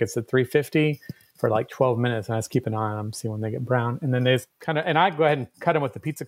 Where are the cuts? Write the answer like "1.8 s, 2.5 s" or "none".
none